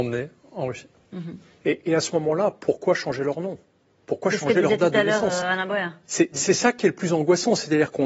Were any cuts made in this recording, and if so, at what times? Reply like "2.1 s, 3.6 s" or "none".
none